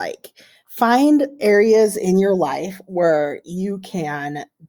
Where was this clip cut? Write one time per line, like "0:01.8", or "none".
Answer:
0:01.4